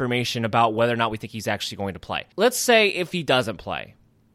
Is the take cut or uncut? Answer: cut